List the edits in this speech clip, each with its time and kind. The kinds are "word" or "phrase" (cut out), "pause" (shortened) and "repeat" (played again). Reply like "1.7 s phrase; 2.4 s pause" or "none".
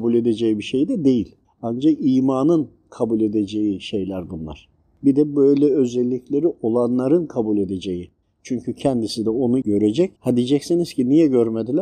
1.4 s pause; 8.2 s pause; 9.6 s word; 10.2 s pause